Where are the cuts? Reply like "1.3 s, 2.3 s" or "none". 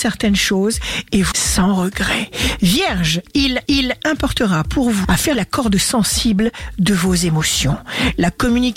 1.3 s, 3.7 s, 5.0 s, 5.3 s

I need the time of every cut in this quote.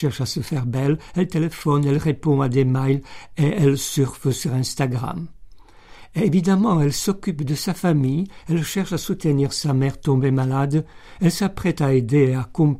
none

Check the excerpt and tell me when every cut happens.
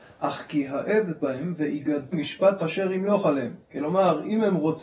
1.2 s, 2.1 s, 2.6 s, 3.6 s

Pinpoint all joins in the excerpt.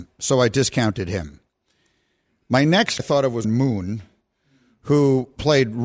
3.0 s, 3.4 s

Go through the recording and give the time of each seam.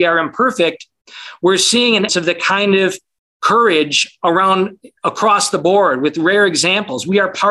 2.1 s

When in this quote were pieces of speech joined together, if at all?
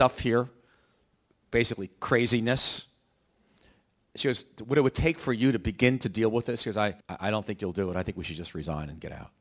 7.0 s

